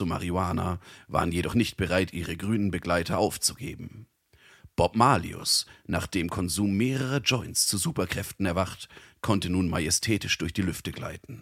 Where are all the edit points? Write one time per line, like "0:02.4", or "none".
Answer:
none

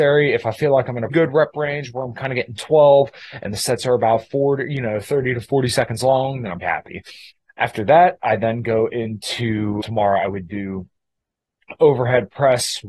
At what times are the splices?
0:01.1
0:06.6
0:07.3
0:09.8

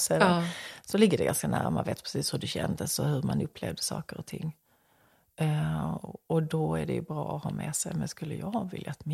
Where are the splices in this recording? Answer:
none

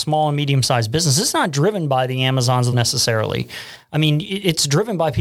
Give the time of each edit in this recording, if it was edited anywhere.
0:02.7

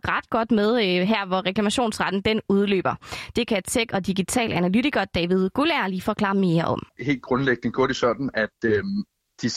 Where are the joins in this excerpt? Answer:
0:06.9

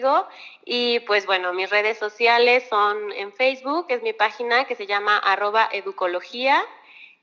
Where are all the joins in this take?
none

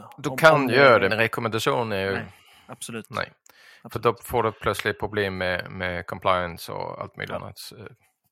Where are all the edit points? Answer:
0:01.1

